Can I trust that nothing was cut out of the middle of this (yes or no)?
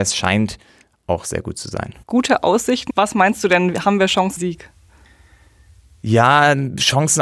no